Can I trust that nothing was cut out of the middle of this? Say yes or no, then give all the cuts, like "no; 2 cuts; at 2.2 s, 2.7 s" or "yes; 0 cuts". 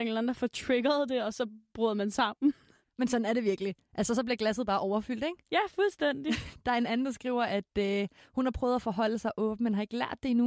yes; 0 cuts